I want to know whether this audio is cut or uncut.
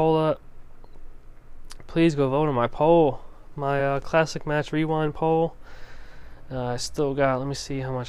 uncut